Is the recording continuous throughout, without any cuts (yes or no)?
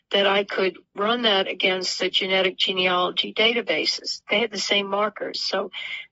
yes